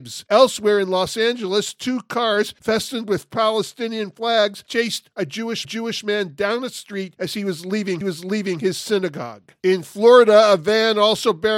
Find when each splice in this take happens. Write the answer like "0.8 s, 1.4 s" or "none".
5.6 s, 8.0 s